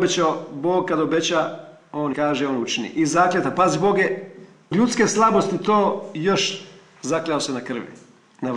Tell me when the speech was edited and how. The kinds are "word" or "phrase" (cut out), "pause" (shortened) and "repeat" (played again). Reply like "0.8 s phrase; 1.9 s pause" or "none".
2.1 s phrase; 4.7 s word